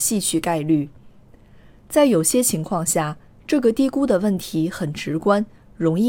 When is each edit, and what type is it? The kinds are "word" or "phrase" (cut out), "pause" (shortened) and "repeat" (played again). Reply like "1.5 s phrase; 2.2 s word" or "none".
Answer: none